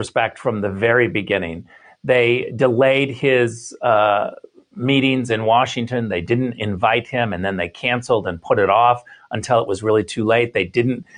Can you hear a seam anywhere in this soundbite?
no; 0 cuts

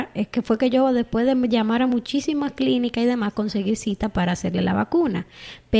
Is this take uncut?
yes; 0 cuts

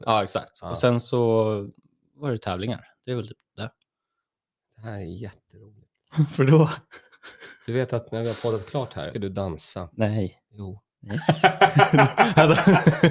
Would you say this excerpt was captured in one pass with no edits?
no; 2 cuts; at 9.1 s, 10.9 s

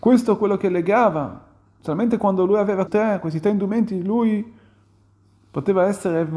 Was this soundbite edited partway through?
yes; 2 cuts; at 1.8 s, 2.9 s

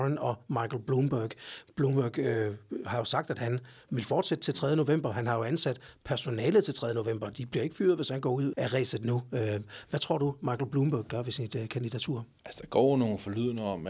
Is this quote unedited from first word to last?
no; 3 cuts; at 1.7 s, 8.5 s, 12.4 s

